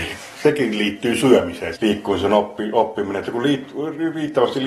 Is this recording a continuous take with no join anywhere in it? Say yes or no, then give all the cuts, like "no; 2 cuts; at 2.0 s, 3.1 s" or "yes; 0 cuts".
no; 1 cut; at 1.8 s